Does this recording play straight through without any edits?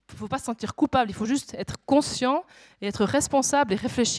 yes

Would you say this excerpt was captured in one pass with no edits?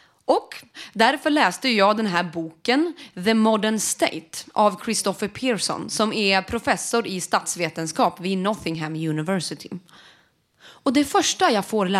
yes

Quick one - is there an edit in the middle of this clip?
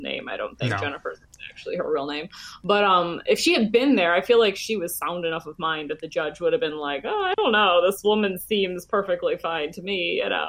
no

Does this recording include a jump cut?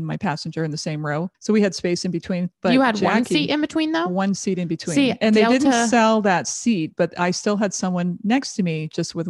yes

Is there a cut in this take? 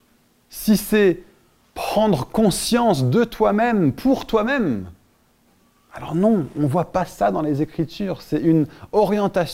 no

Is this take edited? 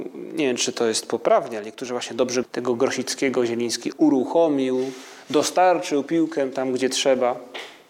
yes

